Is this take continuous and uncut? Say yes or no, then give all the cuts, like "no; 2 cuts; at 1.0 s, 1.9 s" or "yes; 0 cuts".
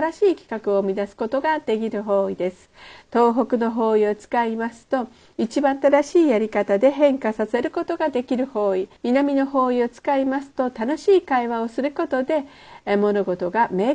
no; 1 cut; at 9.0 s